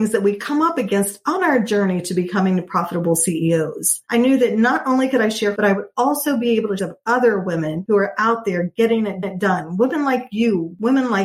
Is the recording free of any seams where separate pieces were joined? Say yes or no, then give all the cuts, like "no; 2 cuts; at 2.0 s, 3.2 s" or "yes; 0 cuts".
no; 3 cuts; at 5.6 s, 6.8 s, 9.2 s